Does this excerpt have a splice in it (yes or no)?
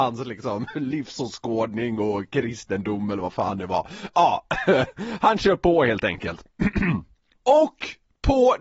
no